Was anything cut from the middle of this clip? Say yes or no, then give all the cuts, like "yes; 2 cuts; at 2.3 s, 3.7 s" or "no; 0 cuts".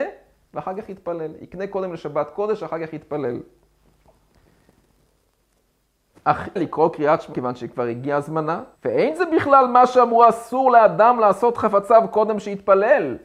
yes; 3 cuts; at 6.6 s, 7.3 s, 8.8 s